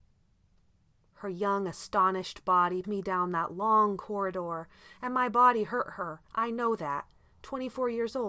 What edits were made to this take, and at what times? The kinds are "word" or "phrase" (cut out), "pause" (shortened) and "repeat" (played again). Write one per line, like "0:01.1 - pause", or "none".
0:02.8 - word
0:06.3 - pause